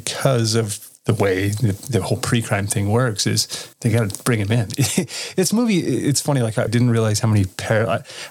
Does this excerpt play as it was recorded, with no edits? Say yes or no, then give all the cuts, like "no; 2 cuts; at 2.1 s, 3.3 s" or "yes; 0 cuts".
no; 2 cuts; at 3.7 s, 6.7 s